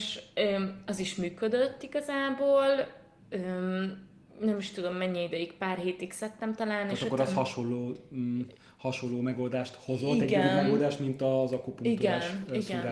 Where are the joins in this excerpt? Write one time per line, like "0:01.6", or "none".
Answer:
none